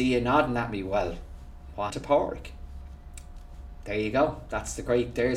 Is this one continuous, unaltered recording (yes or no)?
no